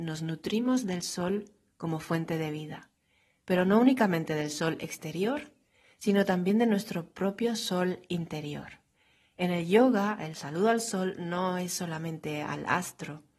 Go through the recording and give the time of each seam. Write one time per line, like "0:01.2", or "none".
none